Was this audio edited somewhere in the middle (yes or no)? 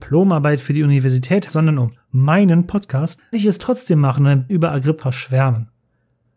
yes